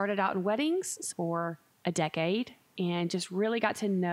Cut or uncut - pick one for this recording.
cut